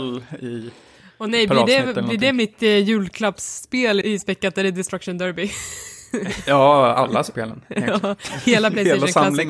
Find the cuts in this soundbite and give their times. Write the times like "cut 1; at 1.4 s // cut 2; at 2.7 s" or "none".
cut 1; at 4.0 s